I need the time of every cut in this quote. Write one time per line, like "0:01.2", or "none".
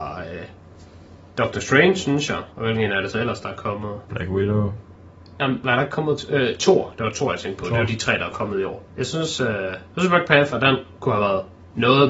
0:02.5
0:04.0
0:08.9